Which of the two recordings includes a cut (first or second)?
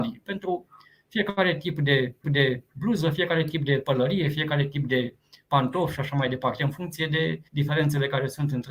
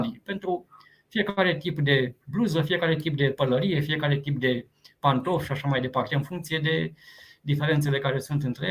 first